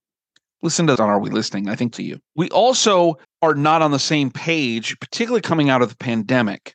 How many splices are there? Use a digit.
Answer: 4